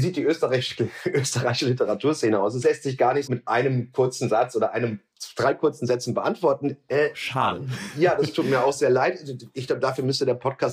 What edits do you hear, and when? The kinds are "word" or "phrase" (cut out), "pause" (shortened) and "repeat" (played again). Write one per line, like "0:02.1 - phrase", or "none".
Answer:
0:03.3 - word

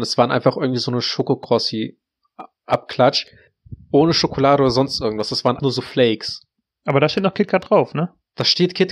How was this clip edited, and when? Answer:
0:05.6 - word

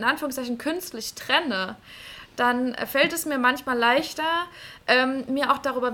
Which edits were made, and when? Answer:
none

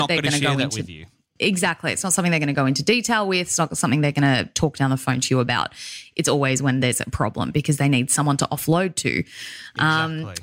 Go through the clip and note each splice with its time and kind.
none

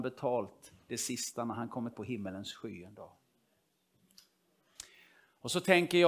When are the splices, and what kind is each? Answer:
0:01.9 - word

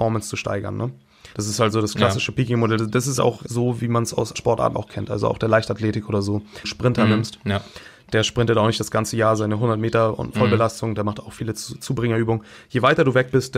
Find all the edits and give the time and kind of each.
0:01.3 - pause
0:03.2 - word
0:04.3 - phrase
0:04.7 - word
0:10.3 - word

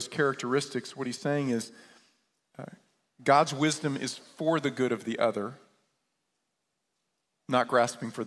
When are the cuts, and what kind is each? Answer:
none

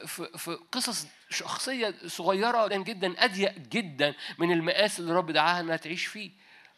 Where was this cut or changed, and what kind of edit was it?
0:02.7 - word

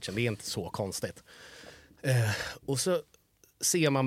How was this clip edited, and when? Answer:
none

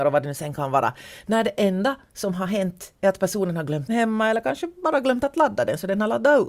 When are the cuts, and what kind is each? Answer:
0:03.9 - word

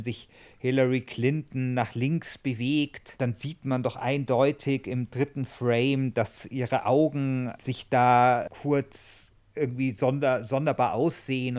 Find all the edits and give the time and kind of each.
none

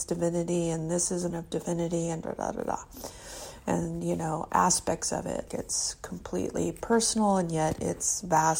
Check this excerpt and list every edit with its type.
0:01.3 - word
0:02.2 - word
0:05.5 - word

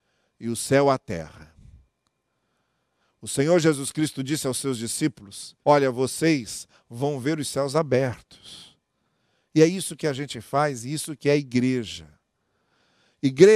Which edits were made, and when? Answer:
0:05.6 - pause

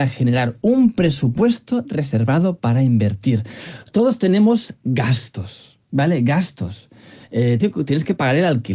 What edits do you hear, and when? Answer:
0:05.8 - pause
0:07.6 - word

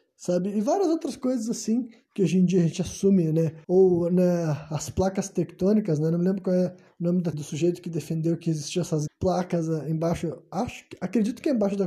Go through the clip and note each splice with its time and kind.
0:03.6 - pause
0:07.3 - phrase
0:09.1 - word

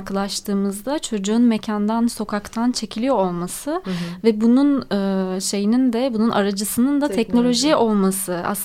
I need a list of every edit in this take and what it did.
none

